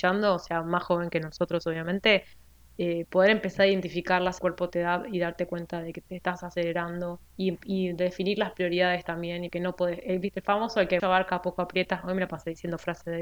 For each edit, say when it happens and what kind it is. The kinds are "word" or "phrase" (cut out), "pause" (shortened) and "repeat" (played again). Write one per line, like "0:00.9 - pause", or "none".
0:02.5 - pause
0:04.4 - phrase
0:07.3 - pause
0:09.5 - word
0:11.0 - word